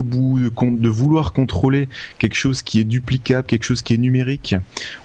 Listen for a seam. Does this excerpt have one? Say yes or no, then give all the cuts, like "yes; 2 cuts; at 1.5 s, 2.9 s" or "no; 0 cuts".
no; 0 cuts